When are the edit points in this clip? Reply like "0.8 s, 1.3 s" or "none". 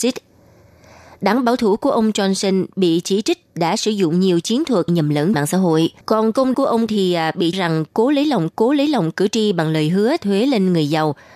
4.9 s, 5.3 s, 6.0 s, 6.5 s, 6.9 s, 7.5 s, 8.5 s, 10.2 s